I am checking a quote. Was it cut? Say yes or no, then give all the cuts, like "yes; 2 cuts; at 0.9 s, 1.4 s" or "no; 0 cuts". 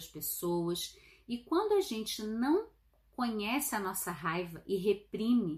no; 0 cuts